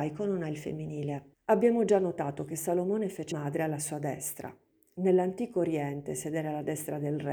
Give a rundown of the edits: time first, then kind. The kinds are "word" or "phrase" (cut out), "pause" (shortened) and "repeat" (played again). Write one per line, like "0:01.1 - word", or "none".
0:01.3 - pause
0:03.3 - phrase